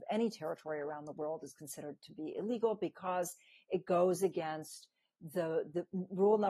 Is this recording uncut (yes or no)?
yes